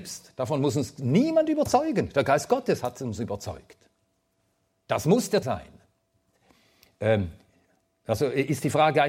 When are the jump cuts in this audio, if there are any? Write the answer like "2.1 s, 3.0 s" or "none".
5.4 s